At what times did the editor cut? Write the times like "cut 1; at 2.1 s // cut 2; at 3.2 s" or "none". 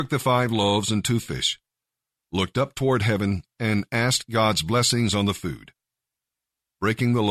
none

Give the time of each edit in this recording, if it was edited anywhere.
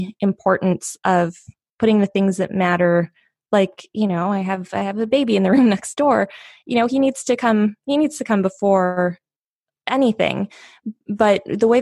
none

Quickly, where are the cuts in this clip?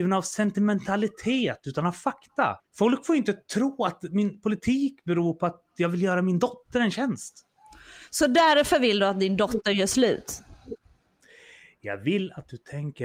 cut 1; at 2.6 s

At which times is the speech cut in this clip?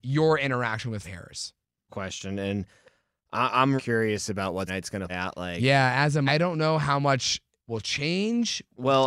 cut 1; at 1.0 s // cut 2; at 1.9 s // cut 3; at 3.8 s // cut 4; at 4.7 s // cut 5; at 5.1 s // cut 6; at 6.3 s

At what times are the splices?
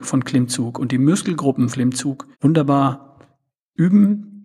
cut 1; at 1.7 s // cut 2; at 2.3 s

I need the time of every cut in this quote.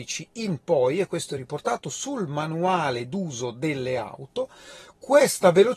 none

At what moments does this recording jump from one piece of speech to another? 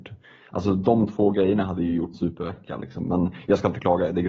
cut 1; at 2.1 s

